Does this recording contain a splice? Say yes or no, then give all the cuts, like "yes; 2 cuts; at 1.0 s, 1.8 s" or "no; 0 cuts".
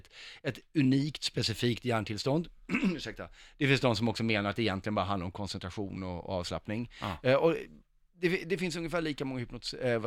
no; 0 cuts